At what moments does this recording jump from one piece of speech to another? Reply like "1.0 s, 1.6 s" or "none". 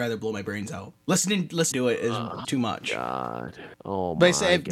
1.0 s, 1.7 s, 2.4 s, 3.7 s